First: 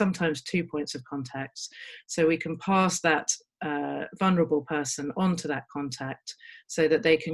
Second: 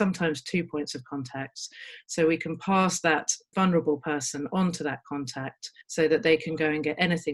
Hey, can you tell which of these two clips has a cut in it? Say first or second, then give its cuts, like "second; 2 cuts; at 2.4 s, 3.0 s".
second; 2 cuts; at 3.5 s, 5.8 s